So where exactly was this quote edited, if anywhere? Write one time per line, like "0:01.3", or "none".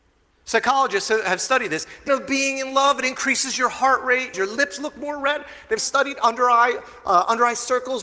0:02.1
0:04.3
0:05.8